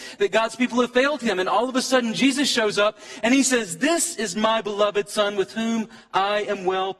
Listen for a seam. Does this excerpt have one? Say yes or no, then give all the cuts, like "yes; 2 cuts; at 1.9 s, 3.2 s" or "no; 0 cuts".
no; 0 cuts